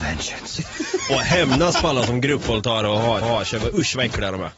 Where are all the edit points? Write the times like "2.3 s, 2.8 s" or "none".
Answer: 3.2 s